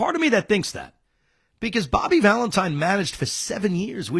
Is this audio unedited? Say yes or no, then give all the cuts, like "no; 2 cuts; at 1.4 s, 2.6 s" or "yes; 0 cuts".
yes; 0 cuts